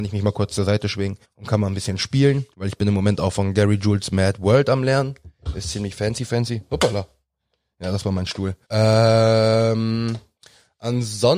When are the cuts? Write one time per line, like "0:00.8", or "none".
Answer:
0:01.2
0:02.5
0:08.6